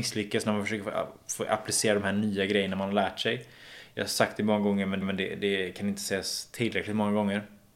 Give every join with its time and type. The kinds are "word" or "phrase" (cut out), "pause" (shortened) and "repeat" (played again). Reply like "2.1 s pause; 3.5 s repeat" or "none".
5.0 s repeat